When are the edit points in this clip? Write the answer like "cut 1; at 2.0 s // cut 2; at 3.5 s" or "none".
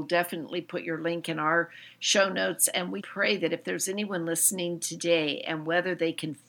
cut 1; at 3.0 s